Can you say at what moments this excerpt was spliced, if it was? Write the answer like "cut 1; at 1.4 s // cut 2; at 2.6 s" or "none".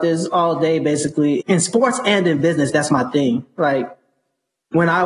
cut 1; at 1.4 s